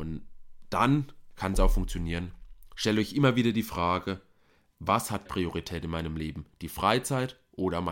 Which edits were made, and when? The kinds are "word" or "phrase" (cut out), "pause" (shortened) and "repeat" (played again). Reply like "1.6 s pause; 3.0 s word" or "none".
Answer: 5.3 s word